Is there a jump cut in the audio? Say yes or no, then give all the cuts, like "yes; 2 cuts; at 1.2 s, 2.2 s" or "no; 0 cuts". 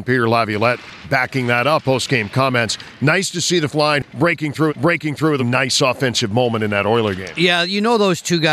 yes; 5 cuts; at 1.0 s, 1.8 s, 3.7 s, 4.7 s, 5.4 s